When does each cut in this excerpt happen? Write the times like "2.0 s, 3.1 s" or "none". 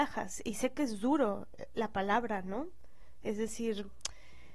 1.7 s